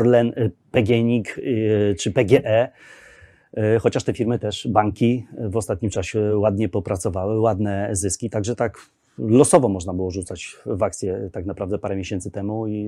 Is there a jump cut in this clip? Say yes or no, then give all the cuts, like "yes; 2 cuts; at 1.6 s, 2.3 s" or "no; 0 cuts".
no; 0 cuts